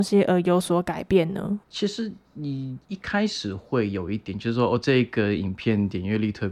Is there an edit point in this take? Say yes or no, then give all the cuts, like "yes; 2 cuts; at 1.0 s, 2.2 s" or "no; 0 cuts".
yes; 1 cut; at 1.6 s